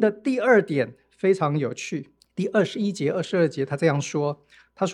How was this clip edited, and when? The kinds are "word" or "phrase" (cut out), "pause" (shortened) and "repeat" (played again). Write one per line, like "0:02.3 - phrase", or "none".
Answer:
0:02.2 - pause